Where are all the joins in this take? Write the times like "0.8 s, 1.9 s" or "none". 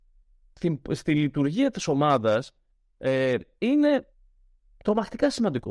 none